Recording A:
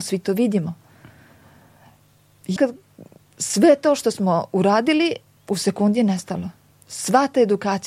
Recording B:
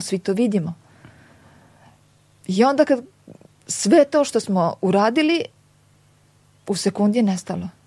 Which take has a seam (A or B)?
A